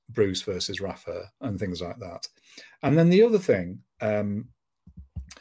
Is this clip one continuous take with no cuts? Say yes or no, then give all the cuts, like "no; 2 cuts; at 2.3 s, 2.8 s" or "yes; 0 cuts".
yes; 0 cuts